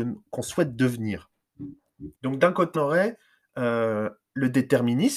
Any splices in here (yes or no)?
yes